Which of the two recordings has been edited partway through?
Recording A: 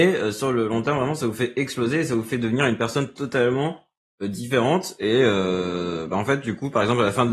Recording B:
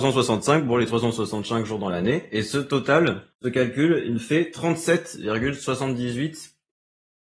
B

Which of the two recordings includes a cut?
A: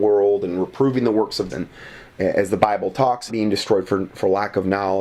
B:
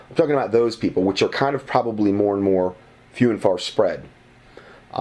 A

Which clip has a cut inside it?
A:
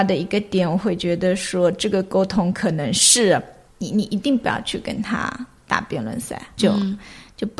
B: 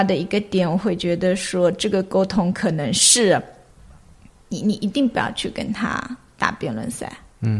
A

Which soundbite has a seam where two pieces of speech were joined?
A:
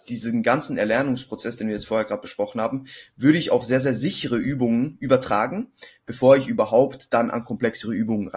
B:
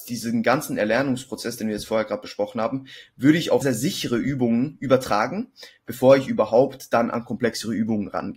B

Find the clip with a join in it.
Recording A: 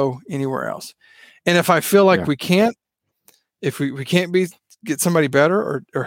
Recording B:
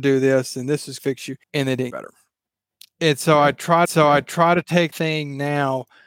B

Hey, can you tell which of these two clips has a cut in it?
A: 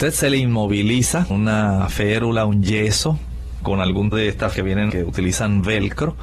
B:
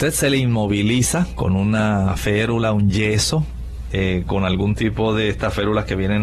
A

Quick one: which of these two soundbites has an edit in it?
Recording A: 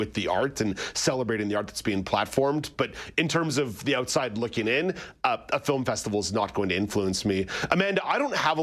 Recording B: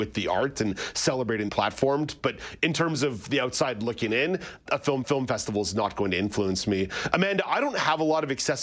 B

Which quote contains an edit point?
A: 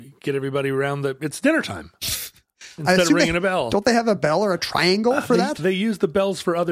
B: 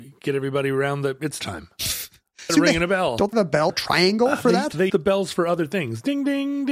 B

